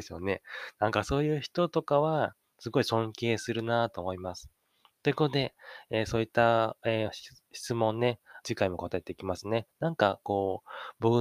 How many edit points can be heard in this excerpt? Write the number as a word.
one